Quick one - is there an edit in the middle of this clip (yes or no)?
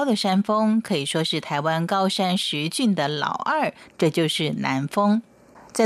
no